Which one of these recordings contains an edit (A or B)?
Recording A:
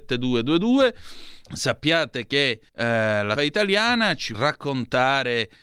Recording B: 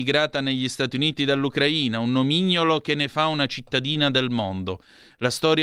A